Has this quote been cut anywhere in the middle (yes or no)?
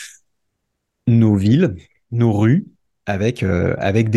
no